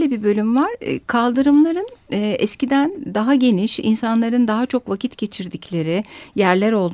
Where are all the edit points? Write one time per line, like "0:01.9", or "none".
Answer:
none